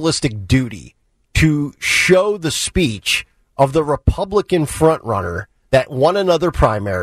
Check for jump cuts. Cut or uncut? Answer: uncut